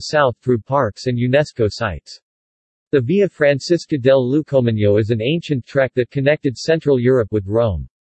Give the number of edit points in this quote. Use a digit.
0